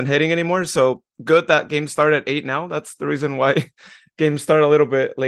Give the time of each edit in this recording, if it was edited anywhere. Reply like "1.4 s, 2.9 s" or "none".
1.1 s

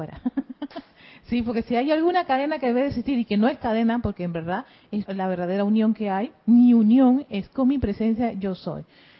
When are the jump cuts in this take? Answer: 5.1 s

